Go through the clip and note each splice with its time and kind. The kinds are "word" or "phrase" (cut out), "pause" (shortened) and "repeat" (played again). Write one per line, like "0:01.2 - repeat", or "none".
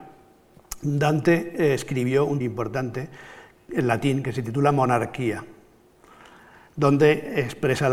0:02.4 - phrase

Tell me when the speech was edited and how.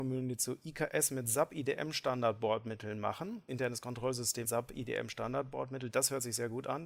0:03.5 - word
0:04.4 - word

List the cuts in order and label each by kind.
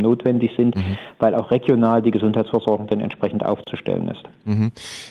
none

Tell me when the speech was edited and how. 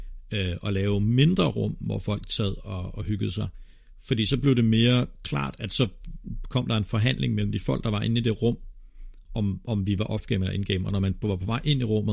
none

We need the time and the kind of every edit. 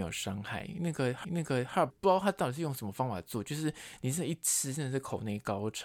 0:01.2 - repeat
0:01.9 - word

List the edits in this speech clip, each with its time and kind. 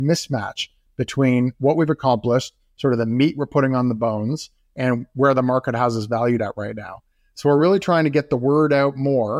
none

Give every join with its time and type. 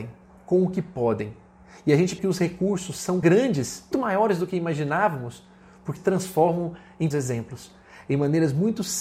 0:02.2 - word
0:03.2 - word
0:03.9 - word
0:06.0 - word
0:07.1 - word

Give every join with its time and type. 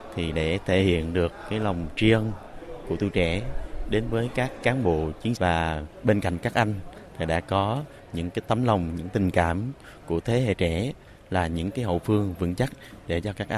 0:05.4 - word

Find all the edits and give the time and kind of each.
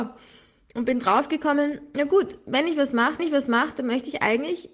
0:03.2 - repeat

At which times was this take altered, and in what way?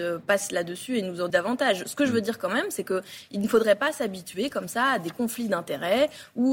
0:01.3 - word

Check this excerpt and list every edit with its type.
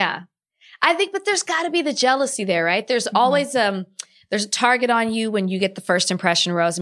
none

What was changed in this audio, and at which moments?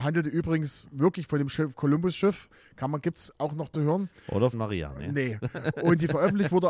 0:03.7 - phrase
0:04.5 - phrase

